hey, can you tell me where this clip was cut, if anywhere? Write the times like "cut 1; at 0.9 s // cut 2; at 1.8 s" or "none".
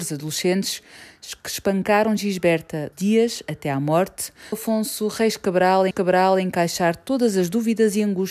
cut 1; at 2.9 s // cut 2; at 4.5 s // cut 3; at 5.9 s